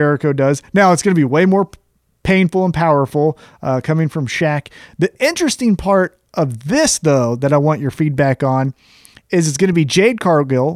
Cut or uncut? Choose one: uncut